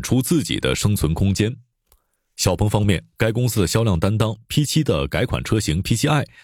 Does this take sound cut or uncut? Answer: uncut